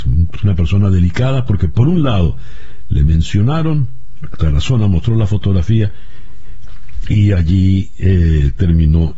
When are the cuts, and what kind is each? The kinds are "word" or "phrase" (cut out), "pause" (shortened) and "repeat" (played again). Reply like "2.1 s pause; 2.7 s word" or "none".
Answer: none